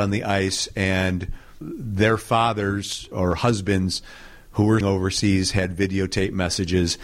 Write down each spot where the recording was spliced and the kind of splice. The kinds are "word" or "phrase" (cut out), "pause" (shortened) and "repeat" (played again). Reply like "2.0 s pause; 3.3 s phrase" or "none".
1.6 s word; 3.1 s word; 4.8 s word